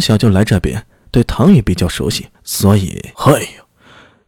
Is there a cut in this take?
yes; 2 cuts; at 2.3 s, 3.1 s

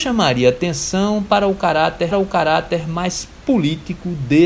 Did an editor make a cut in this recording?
yes; 1 cut; at 2.1 s

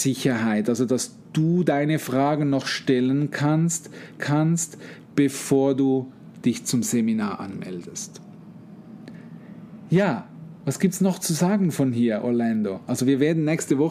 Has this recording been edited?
yes; 1 cut; at 4.2 s

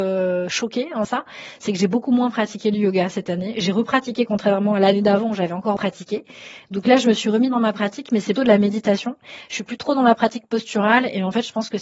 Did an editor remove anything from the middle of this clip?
yes; 3 cuts; at 1.0 s, 5.8 s, 8.4 s

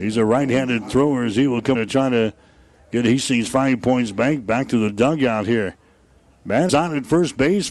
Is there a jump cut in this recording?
yes; 2 cuts; at 1.7 s, 6.7 s

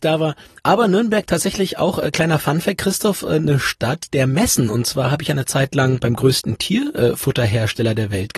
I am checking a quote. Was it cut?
no; 0 cuts

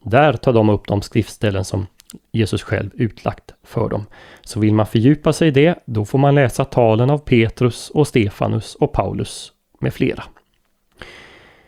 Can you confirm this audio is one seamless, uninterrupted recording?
yes; 0 cuts

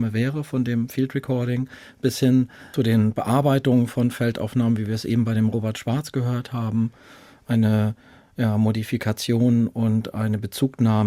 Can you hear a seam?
no; 0 cuts

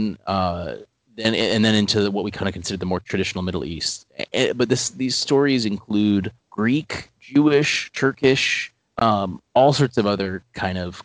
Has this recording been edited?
yes; 2 cuts; at 6.4 s, 8.8 s

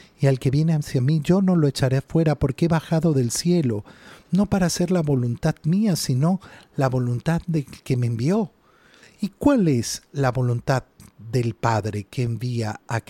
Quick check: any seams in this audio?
no; 0 cuts

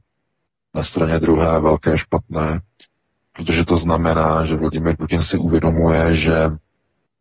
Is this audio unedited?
yes; 0 cuts

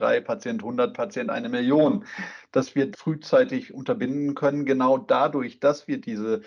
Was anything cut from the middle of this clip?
yes; 1 cut; at 2.9 s

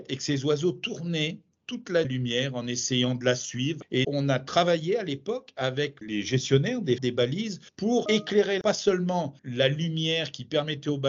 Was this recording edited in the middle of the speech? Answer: yes; 4 cuts; at 2.0 s, 4.0 s, 7.0 s, 7.7 s

